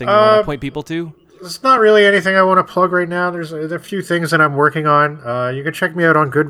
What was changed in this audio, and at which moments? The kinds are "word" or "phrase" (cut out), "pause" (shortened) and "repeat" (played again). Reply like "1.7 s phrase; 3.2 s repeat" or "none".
none